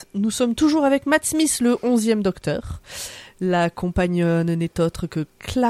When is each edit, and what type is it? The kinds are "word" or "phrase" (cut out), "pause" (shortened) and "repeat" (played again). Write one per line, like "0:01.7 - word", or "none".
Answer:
none